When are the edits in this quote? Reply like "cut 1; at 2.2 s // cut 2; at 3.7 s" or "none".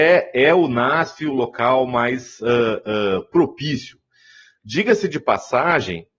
none